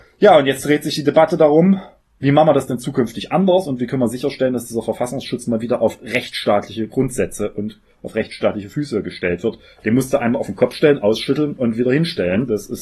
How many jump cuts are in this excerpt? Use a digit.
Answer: 0